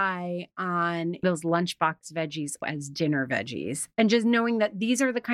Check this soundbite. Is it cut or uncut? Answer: cut